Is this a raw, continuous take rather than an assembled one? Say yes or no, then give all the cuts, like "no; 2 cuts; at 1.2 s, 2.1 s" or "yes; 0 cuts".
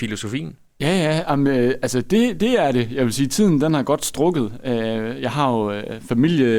yes; 0 cuts